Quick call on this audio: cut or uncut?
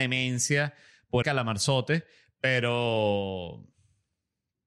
cut